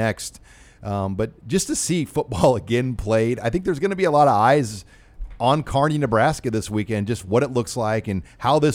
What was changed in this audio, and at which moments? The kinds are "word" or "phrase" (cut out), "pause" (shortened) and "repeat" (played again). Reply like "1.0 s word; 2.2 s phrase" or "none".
1.4 s pause

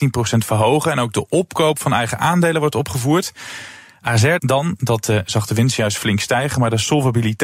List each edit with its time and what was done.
none

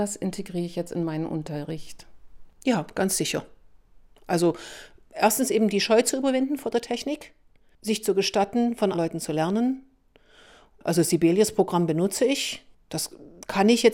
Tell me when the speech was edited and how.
8.9 s word

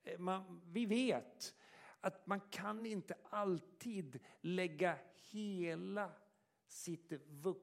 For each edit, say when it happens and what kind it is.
none

